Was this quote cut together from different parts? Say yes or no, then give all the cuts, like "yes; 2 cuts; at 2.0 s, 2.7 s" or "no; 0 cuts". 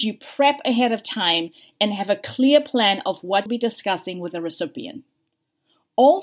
yes; 1 cut; at 3.5 s